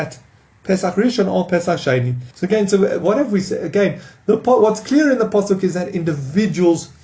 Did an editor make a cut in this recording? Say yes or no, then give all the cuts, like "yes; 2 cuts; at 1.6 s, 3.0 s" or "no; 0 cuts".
yes; 1 cut; at 2.3 s